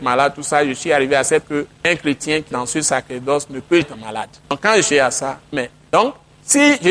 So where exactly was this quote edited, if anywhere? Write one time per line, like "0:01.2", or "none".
0:01.4
0:02.5
0:03.8
0:04.9